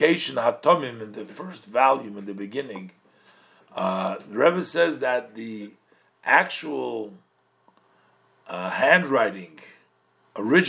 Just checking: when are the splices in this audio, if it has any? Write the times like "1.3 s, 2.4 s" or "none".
none

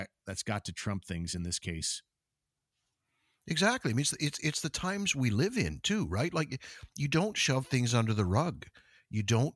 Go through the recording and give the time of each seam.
none

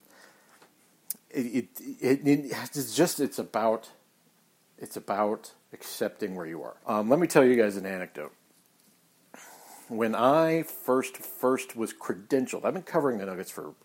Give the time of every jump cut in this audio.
1.3 s, 6.8 s, 11.2 s

